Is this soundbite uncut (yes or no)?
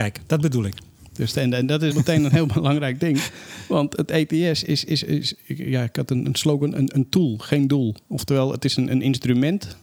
no